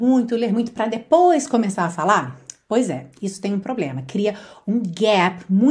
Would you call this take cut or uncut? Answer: uncut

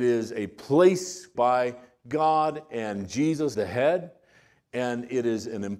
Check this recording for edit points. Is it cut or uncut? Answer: cut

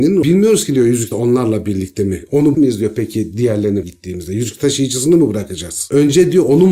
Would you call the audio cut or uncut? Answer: cut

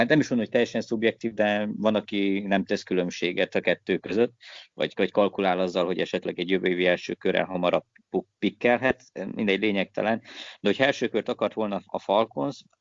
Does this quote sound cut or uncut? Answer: uncut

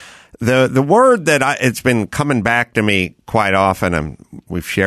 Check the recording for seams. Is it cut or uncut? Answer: uncut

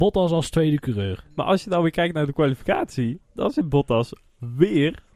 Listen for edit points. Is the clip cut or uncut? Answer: uncut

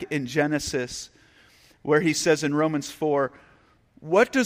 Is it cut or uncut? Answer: uncut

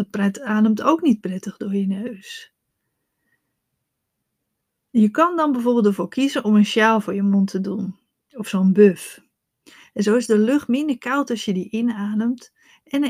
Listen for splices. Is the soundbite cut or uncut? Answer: uncut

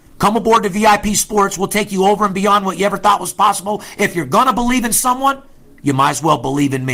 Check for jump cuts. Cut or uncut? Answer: uncut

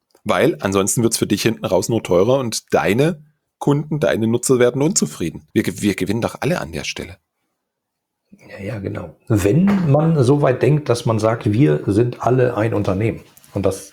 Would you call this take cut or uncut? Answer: cut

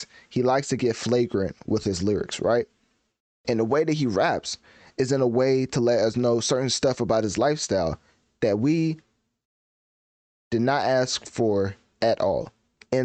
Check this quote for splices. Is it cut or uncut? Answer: uncut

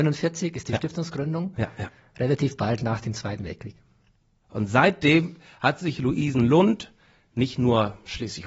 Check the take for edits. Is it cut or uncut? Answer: uncut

